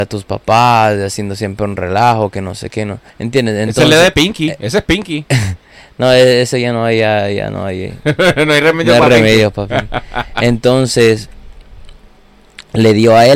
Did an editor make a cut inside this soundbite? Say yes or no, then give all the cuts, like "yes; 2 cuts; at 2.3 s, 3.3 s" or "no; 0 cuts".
yes; 1 cut; at 3.1 s